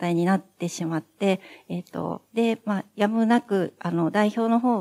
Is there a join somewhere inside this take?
no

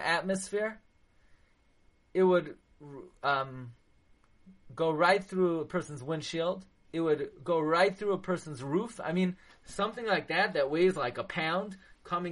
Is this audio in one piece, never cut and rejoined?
yes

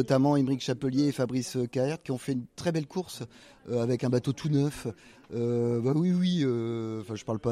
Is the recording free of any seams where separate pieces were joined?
yes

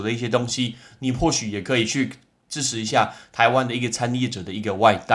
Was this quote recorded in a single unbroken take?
yes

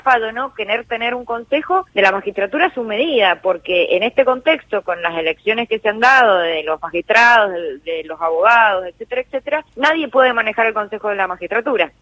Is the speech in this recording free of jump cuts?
no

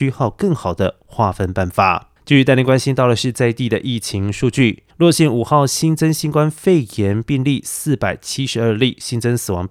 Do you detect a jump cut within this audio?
yes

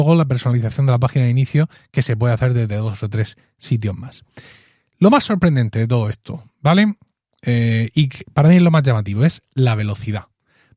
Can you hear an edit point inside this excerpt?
no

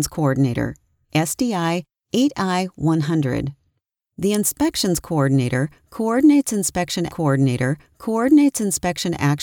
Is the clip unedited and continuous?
no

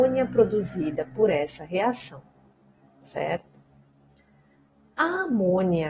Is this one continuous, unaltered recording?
yes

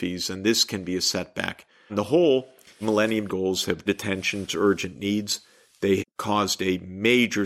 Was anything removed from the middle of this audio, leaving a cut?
yes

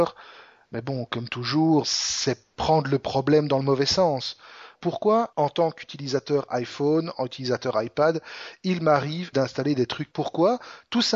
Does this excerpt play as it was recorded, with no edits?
no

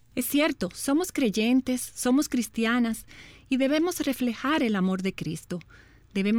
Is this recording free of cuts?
yes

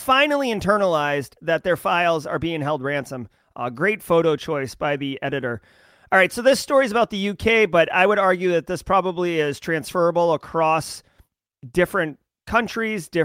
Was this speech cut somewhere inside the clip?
no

